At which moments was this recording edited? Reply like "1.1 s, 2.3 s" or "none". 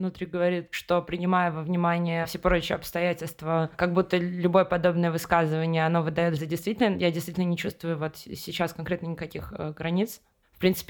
6.4 s